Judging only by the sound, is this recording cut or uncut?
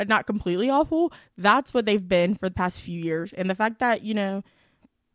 uncut